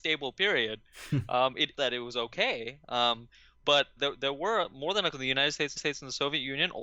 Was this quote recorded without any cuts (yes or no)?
no